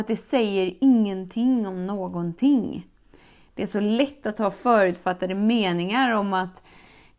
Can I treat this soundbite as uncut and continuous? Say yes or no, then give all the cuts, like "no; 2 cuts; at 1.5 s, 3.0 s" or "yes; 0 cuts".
yes; 0 cuts